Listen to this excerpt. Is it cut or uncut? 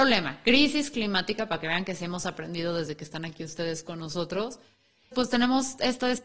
cut